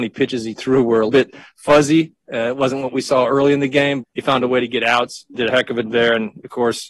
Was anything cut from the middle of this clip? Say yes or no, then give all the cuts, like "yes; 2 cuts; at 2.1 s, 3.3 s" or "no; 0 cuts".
yes; 4 cuts; at 1.1 s, 4.0 s, 5.3 s, 5.8 s